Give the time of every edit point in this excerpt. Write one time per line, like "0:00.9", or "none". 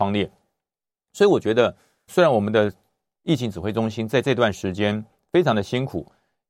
0:02.1